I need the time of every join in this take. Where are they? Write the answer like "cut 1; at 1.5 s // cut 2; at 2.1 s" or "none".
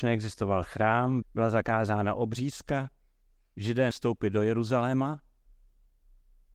cut 1; at 1.2 s // cut 2; at 3.9 s